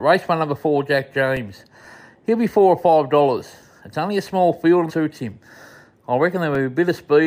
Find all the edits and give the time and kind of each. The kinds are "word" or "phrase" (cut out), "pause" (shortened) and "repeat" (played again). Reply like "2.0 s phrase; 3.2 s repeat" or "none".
4.9 s word